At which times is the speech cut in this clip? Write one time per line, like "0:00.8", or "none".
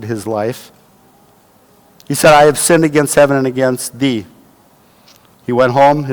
none